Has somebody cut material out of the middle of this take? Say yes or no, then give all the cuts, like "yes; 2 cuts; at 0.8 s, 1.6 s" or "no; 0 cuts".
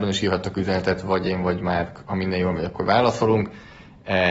no; 0 cuts